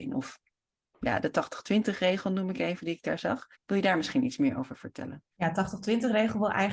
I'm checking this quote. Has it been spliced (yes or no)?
yes